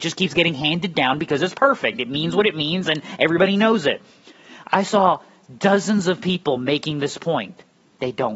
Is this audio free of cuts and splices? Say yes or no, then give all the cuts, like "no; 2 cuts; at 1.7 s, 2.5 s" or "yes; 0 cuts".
yes; 0 cuts